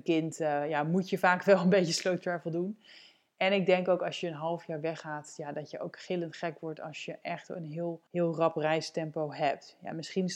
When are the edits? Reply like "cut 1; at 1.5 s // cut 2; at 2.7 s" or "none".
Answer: cut 1; at 8.1 s